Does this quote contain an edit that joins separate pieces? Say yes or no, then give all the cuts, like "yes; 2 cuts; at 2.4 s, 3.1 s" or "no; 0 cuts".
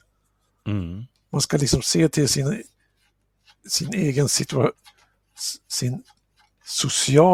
no; 0 cuts